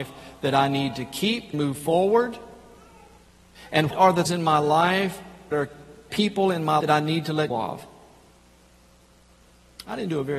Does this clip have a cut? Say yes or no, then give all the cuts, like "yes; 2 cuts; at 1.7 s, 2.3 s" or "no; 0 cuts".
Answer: yes; 7 cuts; at 1.5 s, 3.9 s, 4.3 s, 5.5 s, 6.1 s, 6.8 s, 7.5 s